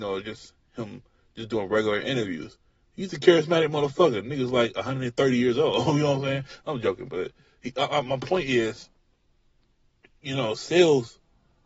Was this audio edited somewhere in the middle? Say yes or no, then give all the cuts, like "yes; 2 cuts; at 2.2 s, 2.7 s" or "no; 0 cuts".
no; 0 cuts